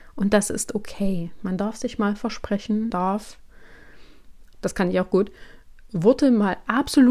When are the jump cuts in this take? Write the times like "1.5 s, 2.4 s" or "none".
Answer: 2.9 s, 4.5 s